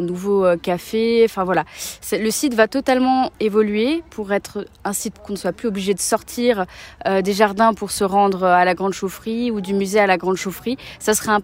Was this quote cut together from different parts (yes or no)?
yes